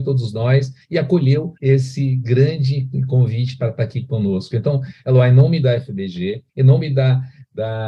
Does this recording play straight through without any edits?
no; 2 cuts; at 1.6 s, 6.5 s

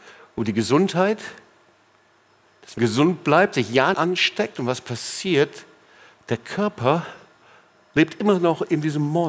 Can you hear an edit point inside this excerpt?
yes; 2 cuts; at 2.8 s, 3.9 s

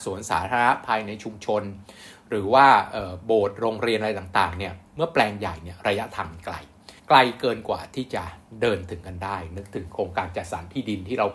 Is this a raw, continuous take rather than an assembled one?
no; 1 cut; at 7.0 s

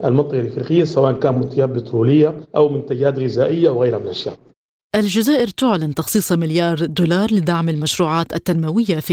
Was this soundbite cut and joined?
no; 0 cuts

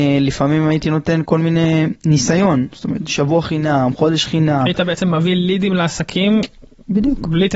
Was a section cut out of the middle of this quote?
no; 0 cuts

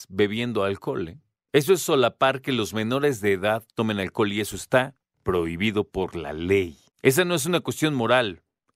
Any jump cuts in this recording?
no; 0 cuts

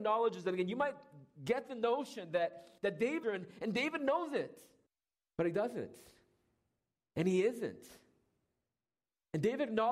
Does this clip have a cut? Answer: yes; 3 cuts; at 2.8 s, 3.2 s, 4.9 s

